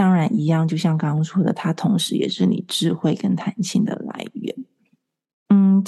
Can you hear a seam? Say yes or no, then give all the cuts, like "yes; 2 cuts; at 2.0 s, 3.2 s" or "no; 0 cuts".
no; 0 cuts